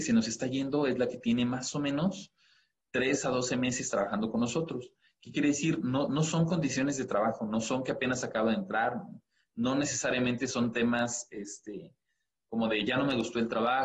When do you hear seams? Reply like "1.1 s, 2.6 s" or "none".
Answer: none